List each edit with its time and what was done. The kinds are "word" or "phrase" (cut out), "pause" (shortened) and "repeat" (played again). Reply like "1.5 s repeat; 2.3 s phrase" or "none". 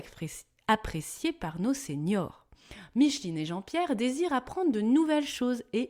none